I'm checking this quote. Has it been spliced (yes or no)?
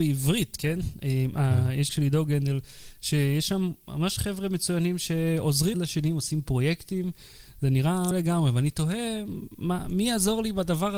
yes